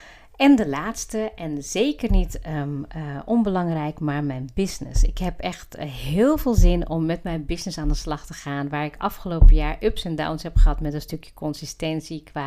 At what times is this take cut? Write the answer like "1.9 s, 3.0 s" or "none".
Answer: none